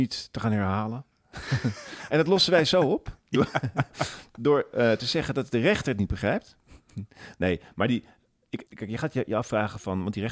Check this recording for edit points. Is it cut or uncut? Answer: cut